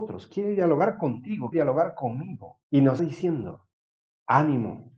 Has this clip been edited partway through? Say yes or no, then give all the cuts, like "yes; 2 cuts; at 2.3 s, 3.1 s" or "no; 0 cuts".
yes; 4 cuts; at 1.5 s, 2.6 s, 3.0 s, 4.0 s